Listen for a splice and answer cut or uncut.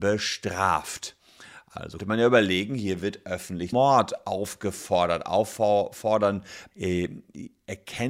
cut